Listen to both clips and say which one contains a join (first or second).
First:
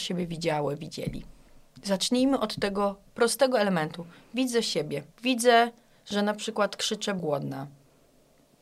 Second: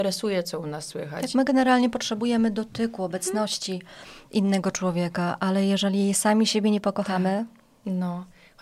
first